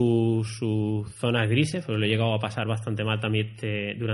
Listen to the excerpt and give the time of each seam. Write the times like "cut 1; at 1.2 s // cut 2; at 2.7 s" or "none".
none